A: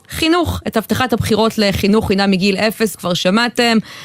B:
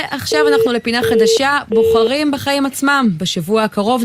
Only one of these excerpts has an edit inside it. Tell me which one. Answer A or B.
A